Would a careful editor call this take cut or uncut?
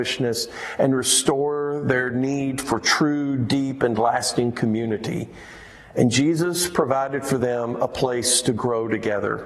uncut